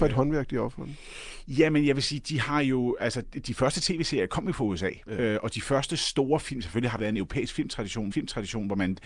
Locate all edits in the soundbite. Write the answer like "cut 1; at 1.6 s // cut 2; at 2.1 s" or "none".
cut 1; at 3.2 s // cut 2; at 7.0 s // cut 3; at 8.1 s